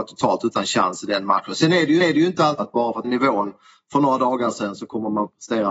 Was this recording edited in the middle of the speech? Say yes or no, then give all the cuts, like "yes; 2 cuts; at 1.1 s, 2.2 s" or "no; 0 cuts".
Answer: yes; 3 cuts; at 2.0 s, 2.6 s, 3.0 s